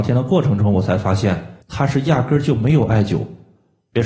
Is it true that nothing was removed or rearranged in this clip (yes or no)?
no